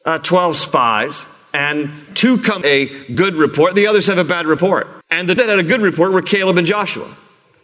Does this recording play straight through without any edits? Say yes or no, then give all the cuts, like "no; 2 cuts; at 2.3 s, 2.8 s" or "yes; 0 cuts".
no; 3 cuts; at 2.6 s, 5.0 s, 5.4 s